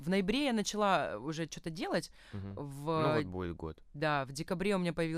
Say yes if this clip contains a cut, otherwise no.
no